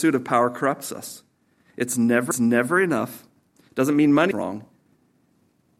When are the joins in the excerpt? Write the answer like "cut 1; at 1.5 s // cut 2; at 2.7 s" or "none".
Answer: cut 1; at 2.3 s // cut 2; at 4.3 s

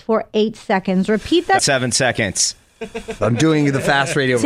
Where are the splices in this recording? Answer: cut 1; at 1.6 s

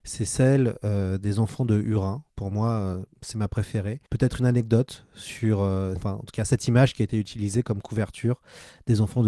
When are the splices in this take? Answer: cut 1; at 2.3 s // cut 2; at 4.1 s // cut 3; at 6.0 s

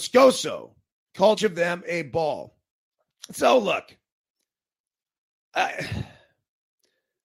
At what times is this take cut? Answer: cut 1; at 1.4 s

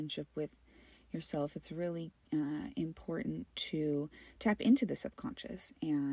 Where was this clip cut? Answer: none

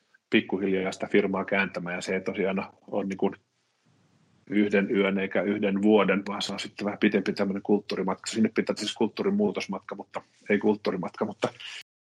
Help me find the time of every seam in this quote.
cut 1; at 6.2 s // cut 2; at 8.2 s // cut 3; at 8.8 s

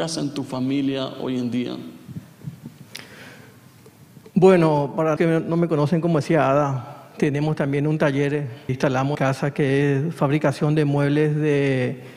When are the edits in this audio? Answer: cut 1; at 5.2 s // cut 2; at 8.7 s // cut 3; at 9.1 s

